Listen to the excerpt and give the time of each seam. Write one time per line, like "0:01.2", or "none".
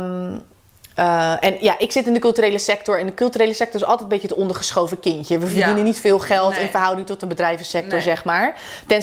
none